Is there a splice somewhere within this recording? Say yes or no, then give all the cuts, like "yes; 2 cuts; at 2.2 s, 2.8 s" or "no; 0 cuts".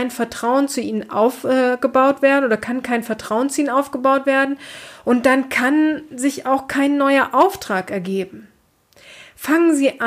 no; 0 cuts